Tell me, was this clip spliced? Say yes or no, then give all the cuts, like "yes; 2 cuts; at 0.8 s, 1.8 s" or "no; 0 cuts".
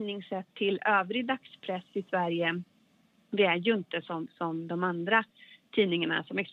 no; 0 cuts